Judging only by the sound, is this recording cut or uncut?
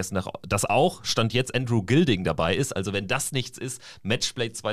uncut